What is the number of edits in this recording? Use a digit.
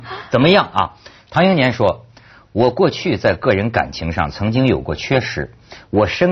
0